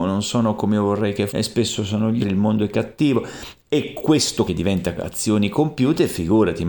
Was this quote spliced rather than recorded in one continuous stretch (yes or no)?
yes